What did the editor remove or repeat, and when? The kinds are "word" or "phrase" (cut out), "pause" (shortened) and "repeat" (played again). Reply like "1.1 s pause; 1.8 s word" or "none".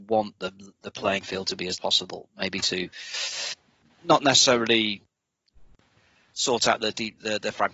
1.8 s phrase